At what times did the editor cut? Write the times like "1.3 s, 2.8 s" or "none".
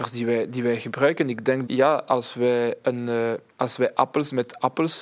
1.7 s